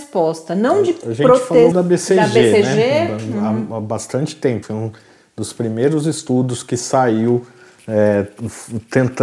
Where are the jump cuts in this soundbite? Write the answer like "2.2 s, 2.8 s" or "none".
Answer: 1.7 s, 4.6 s